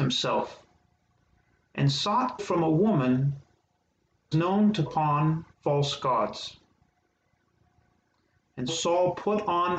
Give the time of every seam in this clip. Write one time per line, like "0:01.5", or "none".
0:02.4
0:04.3
0:04.9
0:05.5
0:08.7